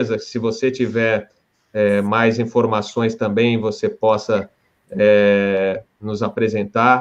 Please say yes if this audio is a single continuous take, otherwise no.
yes